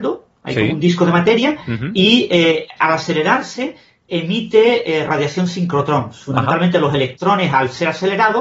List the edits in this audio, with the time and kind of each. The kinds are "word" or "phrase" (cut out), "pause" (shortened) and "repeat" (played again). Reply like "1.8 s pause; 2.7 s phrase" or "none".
none